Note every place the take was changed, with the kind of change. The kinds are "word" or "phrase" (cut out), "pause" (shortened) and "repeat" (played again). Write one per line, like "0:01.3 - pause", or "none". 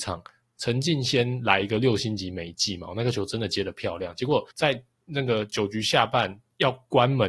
0:04.5 - pause